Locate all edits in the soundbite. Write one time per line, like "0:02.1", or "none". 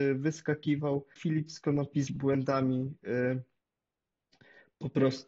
0:01.2
0:02.1